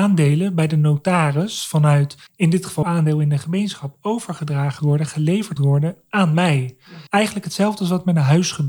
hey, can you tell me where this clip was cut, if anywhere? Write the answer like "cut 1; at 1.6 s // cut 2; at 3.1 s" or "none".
cut 1; at 2.3 s // cut 2; at 2.8 s // cut 3; at 4.8 s // cut 4; at 5.6 s // cut 5; at 7.1 s